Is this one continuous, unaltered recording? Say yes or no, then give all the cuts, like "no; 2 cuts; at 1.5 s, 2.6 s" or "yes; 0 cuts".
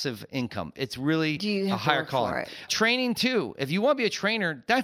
yes; 0 cuts